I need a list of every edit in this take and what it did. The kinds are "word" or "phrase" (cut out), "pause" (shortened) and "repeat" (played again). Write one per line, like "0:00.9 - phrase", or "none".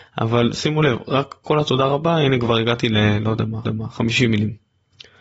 0:03.6 - repeat